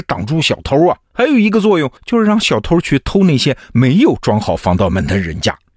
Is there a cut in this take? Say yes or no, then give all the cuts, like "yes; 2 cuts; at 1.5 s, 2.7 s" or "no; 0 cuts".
yes; 1 cut; at 2.0 s